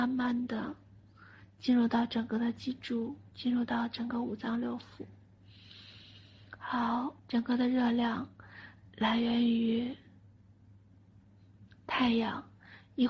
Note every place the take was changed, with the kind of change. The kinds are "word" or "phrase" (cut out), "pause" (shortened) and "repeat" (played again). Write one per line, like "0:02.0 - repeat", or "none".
0:03.3 - pause
0:07.2 - pause